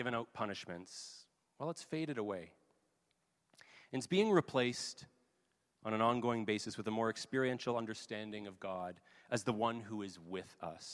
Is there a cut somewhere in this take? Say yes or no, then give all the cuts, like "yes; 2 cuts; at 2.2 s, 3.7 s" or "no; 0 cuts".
no; 0 cuts